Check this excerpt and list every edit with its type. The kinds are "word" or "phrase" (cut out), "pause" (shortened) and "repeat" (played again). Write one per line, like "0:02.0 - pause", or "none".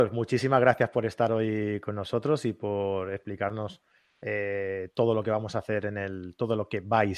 none